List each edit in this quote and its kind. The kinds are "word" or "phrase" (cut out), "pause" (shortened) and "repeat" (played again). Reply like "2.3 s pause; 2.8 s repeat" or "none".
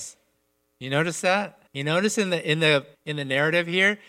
1.7 s pause; 2.9 s pause